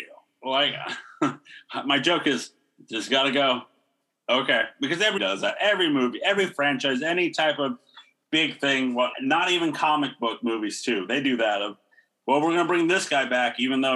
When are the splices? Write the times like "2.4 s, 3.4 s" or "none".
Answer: 5.2 s, 9.1 s